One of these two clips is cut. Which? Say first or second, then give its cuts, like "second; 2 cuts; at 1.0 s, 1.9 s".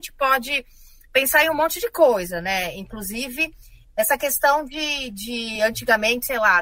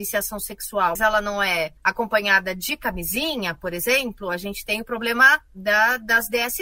second; 2 cuts; at 1.0 s, 1.8 s